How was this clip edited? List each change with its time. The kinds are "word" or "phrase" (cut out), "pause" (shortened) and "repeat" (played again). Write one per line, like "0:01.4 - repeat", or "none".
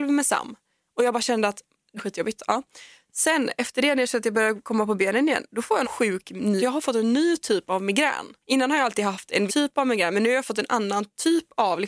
0:02.0 - word
0:05.8 - word
0:06.6 - word
0:09.5 - word